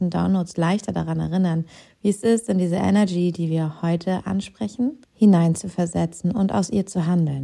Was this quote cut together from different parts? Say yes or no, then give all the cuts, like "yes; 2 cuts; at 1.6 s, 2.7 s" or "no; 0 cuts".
no; 0 cuts